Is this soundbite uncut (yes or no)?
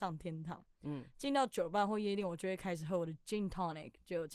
yes